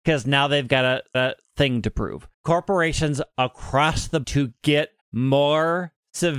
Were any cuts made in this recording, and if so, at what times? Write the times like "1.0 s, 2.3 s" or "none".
1.1 s, 2.3 s, 4.2 s, 5.0 s